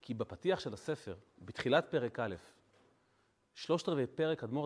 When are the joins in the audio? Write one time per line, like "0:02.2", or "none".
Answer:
none